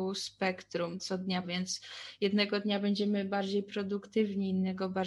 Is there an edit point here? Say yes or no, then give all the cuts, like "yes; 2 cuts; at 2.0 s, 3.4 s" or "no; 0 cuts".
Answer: yes; 2 cuts; at 1.0 s, 1.4 s